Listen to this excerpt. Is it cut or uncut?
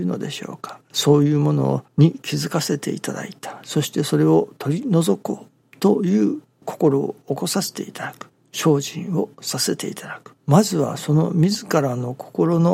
cut